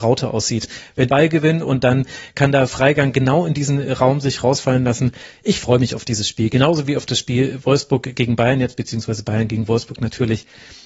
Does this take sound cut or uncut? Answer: cut